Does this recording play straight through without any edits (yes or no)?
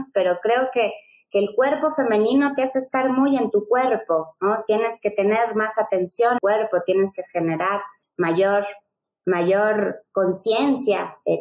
no